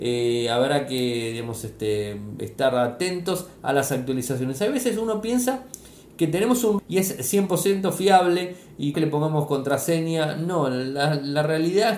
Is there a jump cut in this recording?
yes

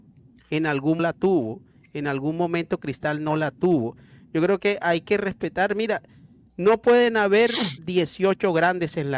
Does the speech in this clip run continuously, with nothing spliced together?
no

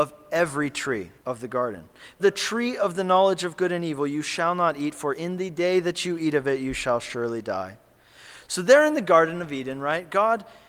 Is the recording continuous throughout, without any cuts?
no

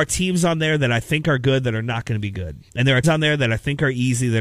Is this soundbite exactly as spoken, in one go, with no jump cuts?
no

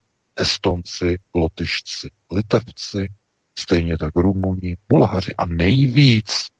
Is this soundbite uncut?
yes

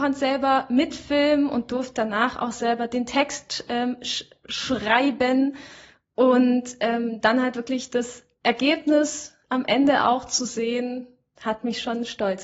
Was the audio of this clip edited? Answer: no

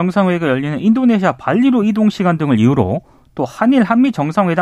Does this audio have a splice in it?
no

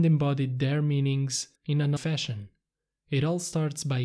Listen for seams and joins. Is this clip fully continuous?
no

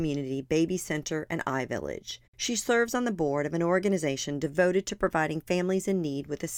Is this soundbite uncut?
no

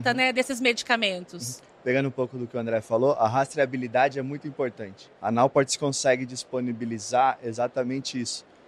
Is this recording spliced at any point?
yes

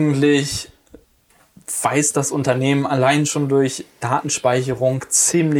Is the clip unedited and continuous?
no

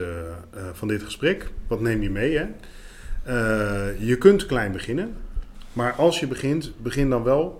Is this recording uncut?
yes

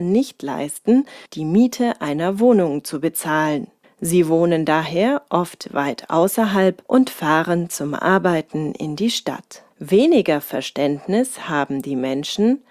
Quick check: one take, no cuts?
no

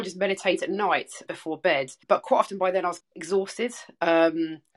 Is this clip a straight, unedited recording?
no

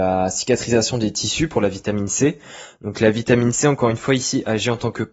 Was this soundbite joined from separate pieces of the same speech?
no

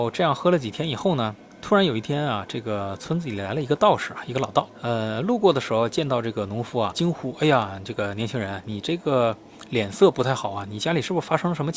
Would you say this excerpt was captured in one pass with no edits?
yes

